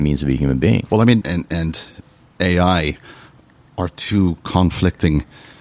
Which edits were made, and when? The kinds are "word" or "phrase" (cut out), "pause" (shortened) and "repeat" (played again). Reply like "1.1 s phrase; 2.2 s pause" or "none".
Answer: 1.2 s phrase